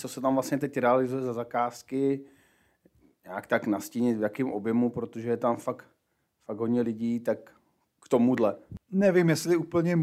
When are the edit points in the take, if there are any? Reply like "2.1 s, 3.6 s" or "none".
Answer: none